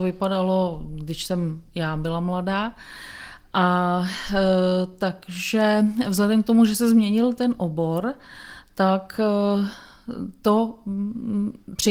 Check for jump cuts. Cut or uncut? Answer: uncut